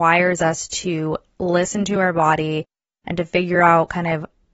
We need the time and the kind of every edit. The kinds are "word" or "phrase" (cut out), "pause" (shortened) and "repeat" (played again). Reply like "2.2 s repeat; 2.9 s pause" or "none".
none